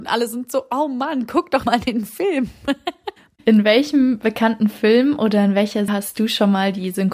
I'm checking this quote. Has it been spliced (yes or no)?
yes